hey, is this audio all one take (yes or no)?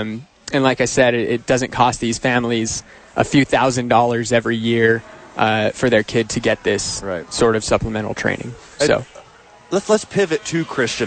yes